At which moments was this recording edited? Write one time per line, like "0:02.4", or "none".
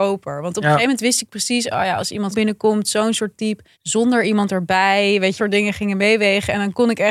0:02.3
0:03.7
0:05.4